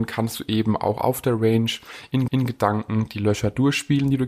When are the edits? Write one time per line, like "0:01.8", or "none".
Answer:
0:02.3